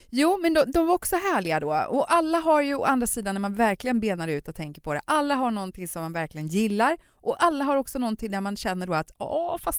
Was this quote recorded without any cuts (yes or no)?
yes